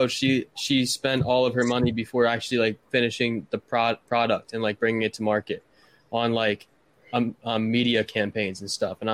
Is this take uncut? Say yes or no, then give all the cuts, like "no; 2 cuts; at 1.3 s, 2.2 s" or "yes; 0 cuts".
yes; 0 cuts